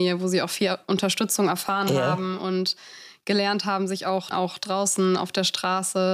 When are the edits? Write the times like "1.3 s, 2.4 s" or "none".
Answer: 4.3 s